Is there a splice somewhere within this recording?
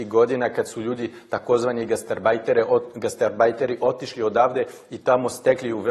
no; 0 cuts

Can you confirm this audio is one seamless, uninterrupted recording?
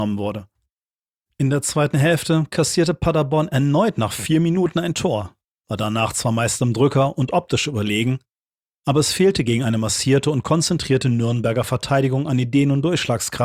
yes; 0 cuts

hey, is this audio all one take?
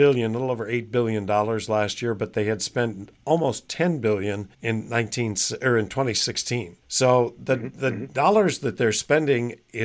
no; 2 cuts; at 4.5 s, 6.8 s

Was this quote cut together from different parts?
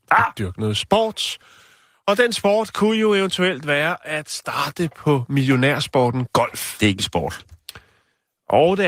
no; 0 cuts

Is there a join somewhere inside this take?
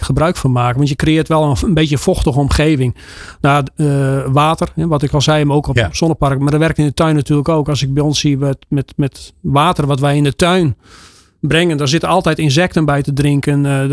no; 0 cuts

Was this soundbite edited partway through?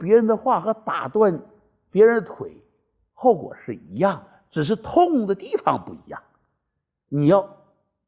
no; 0 cuts

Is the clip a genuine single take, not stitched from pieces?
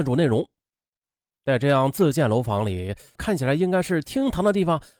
no; 1 cut; at 3.2 s

